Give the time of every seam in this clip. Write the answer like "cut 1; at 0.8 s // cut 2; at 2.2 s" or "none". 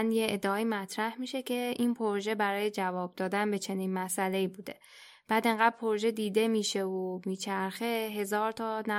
none